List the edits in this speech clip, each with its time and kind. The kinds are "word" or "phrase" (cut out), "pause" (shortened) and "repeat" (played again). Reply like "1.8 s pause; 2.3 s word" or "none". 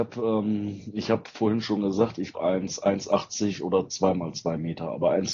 2.3 s word